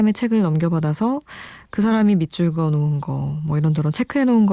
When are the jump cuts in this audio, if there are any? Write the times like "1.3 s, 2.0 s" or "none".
none